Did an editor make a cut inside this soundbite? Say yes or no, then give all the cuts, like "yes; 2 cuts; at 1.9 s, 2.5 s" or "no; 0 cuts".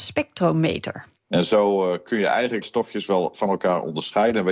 yes; 2 cuts; at 1.2 s, 2.6 s